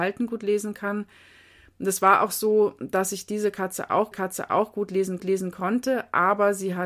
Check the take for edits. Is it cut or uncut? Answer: cut